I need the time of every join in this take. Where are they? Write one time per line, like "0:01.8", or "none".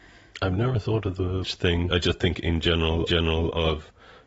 0:01.4
0:01.9
0:03.1